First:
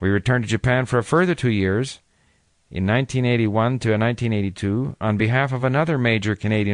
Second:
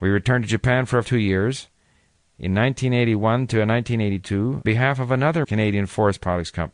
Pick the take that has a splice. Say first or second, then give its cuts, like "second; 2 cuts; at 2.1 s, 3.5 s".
second; 3 cuts; at 1.0 s, 4.6 s, 5.4 s